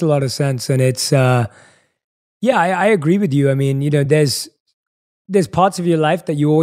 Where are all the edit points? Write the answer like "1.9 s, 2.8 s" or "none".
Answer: none

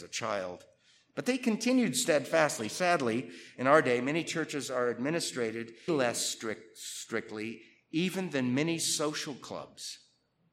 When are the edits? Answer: 5.9 s

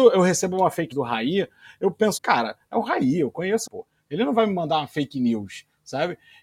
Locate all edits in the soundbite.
0.9 s, 2.2 s, 3.7 s

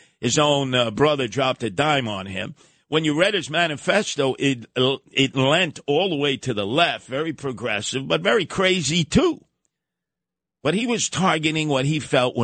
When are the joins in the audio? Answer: none

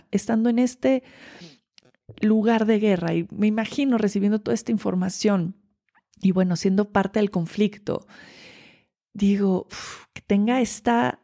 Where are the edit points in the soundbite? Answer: none

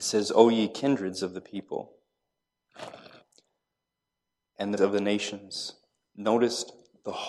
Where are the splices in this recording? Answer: 4.8 s

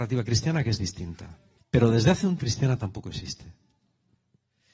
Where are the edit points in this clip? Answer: 1.6 s, 2.4 s

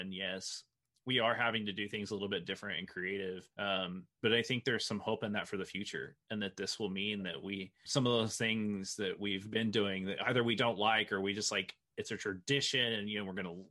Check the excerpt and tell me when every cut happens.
3.5 s, 7.9 s

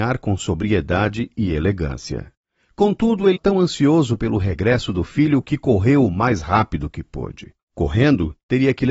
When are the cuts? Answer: 3.4 s

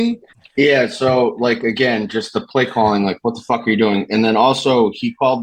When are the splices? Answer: none

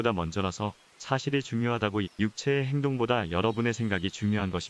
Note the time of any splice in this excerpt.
2.0 s

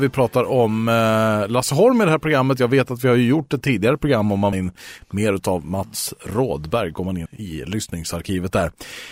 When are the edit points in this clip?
4.5 s, 7.3 s

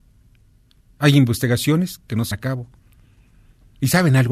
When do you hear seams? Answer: 2.3 s

